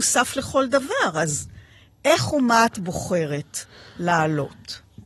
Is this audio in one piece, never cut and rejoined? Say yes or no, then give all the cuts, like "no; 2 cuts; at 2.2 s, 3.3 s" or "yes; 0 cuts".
yes; 0 cuts